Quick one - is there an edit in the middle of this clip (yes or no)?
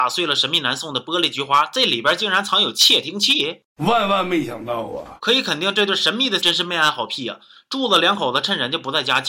yes